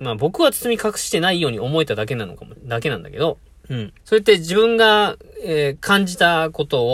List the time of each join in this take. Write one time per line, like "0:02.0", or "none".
0:03.5
0:04.0